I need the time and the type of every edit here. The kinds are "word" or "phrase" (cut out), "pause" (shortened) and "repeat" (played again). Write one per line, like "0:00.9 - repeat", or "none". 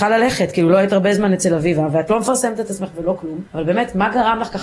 0:03.5 - pause